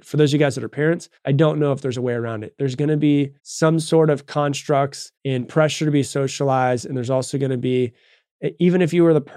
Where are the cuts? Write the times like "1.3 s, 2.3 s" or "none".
1.2 s, 3.4 s, 5.2 s

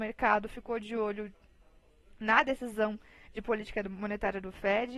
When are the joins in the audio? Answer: none

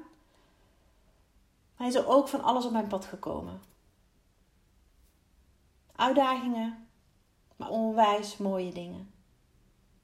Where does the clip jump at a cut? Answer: 7.7 s

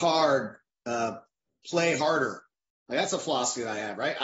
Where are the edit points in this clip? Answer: none

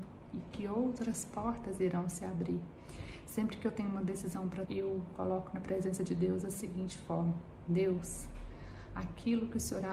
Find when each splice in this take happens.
4.7 s

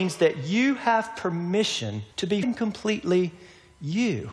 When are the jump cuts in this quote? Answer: 2.1 s, 2.4 s

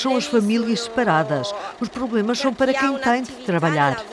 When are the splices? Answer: none

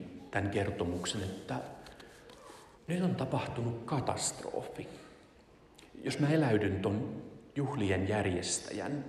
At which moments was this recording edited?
2.8 s

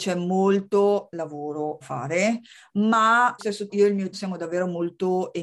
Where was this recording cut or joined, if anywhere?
1.8 s, 3.4 s, 3.7 s, 4.1 s

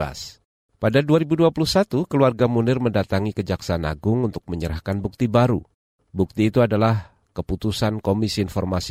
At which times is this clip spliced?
none

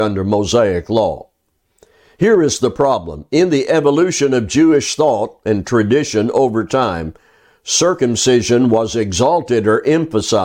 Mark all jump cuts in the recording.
none

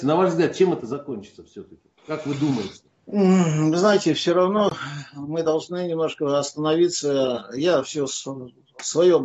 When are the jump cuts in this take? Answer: 2.0 s, 2.9 s

